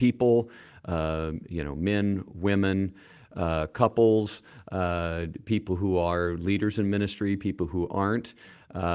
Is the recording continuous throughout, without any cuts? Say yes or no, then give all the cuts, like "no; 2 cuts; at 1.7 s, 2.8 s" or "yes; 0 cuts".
yes; 0 cuts